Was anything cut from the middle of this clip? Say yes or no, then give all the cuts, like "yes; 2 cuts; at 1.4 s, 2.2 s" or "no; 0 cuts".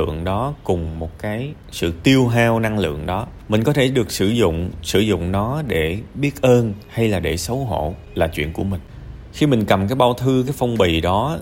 no; 0 cuts